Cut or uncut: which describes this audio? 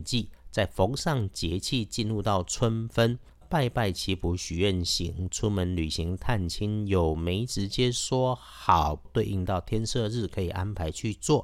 cut